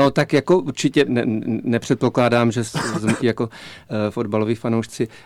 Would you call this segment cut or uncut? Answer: cut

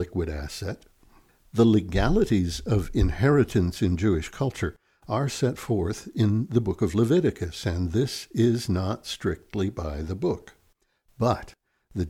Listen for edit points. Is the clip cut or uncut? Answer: uncut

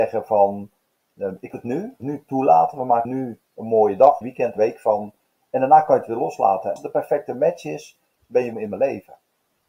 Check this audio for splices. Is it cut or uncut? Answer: cut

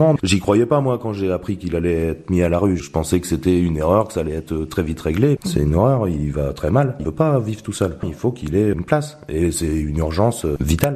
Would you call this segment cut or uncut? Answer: cut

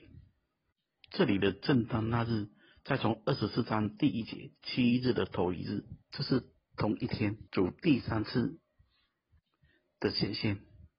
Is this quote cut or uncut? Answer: cut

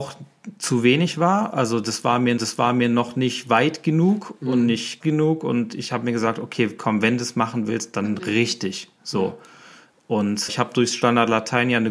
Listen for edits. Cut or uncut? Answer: cut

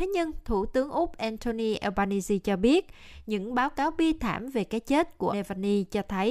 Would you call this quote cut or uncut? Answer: cut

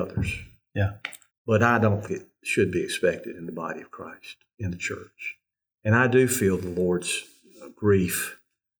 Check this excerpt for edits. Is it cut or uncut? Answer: cut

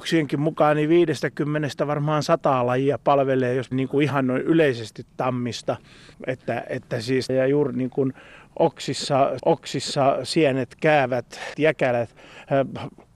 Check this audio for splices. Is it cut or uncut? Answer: cut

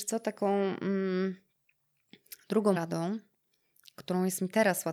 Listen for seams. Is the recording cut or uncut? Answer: cut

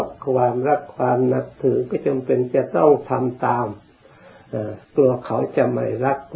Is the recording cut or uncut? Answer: cut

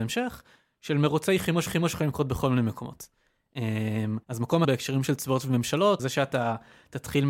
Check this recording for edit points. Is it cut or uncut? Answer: cut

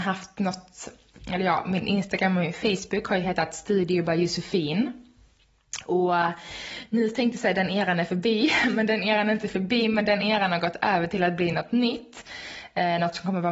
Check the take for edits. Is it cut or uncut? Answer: uncut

